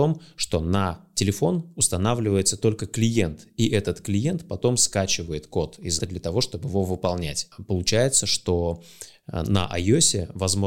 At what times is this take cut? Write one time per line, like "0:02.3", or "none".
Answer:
0:06.0